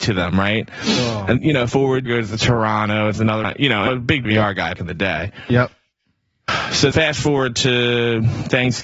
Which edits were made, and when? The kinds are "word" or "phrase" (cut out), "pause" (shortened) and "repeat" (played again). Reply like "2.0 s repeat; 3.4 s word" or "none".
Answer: 1.4 s word; 1.7 s word; 2.1 s word; 3.4 s word; 3.9 s word; 4.2 s word; 4.8 s word; 6.9 s word